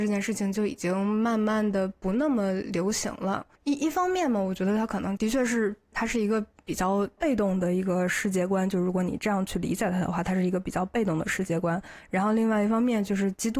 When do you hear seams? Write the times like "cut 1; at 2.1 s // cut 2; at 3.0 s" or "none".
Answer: cut 1; at 3.6 s

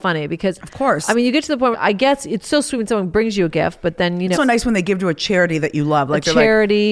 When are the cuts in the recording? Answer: cut 1; at 1.7 s // cut 2; at 4.3 s

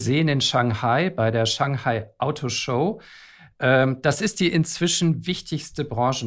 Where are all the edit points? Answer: none

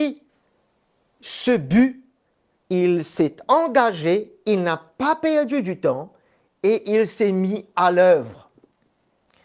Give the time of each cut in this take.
none

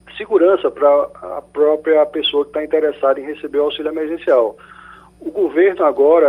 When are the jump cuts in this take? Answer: none

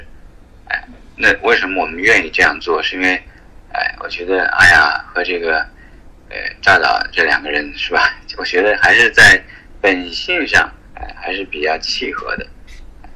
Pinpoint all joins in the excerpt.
none

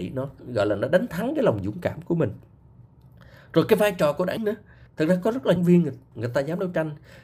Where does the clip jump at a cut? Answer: cut 1; at 4.4 s // cut 2; at 5.6 s // cut 3; at 6.1 s

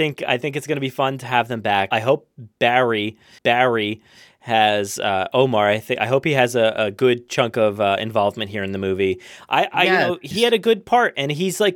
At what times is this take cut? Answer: cut 1; at 1.9 s // cut 2; at 3.4 s // cut 3; at 10.3 s

